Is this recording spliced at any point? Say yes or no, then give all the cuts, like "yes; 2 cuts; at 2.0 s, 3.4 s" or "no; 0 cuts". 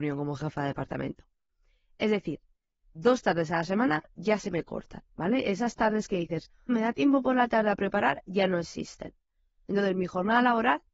yes; 2 cuts; at 5.1 s, 6.7 s